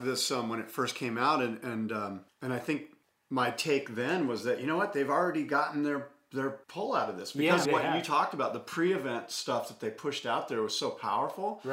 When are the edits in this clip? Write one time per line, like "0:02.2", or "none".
0:02.3
0:03.0
0:06.6
0:07.7